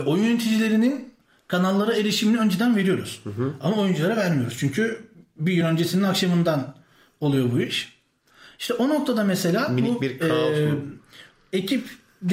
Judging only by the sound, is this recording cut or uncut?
uncut